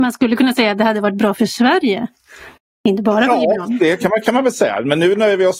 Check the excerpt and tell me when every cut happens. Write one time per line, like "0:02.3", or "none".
0:02.6